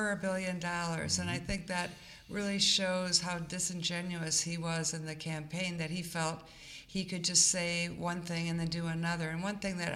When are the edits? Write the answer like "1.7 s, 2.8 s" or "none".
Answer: none